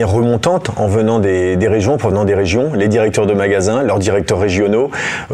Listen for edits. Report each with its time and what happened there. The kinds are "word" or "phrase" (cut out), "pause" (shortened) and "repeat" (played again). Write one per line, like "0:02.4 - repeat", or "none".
none